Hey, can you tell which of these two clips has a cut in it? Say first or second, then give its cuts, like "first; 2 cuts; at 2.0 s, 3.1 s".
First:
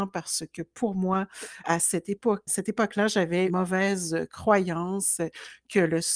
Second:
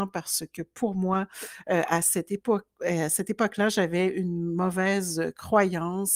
first; 3 cuts; at 1.6 s, 2.5 s, 3.5 s